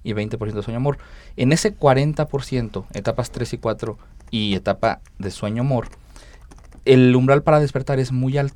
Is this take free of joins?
yes; 0 cuts

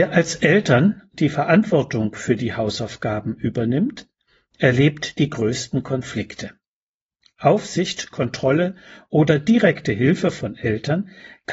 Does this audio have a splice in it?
no; 0 cuts

